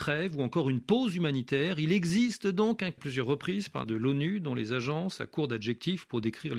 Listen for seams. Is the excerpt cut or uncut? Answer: cut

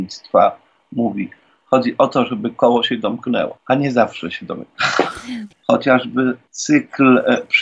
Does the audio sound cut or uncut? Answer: uncut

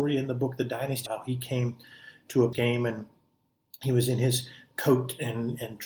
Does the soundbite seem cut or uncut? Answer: cut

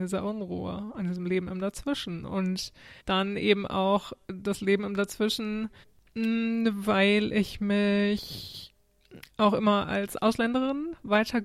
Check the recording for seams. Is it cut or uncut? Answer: cut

